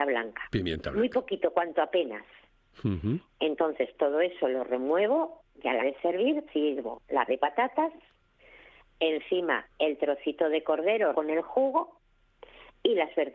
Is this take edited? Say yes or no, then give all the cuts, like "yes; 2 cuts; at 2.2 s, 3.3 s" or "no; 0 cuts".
yes; 4 cuts; at 5.8 s, 6.5 s, 7.3 s, 11.1 s